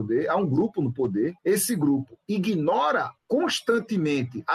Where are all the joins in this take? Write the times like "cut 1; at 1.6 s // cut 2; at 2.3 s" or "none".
cut 1; at 1.4 s // cut 2; at 3.2 s